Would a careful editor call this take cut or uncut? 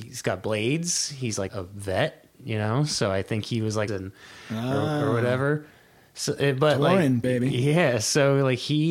cut